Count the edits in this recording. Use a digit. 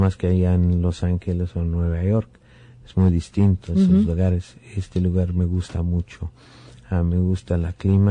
0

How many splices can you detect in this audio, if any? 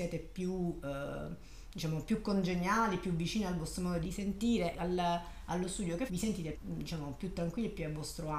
4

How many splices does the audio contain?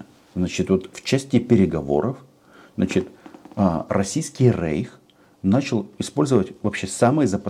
0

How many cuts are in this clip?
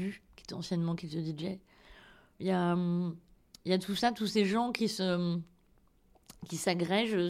0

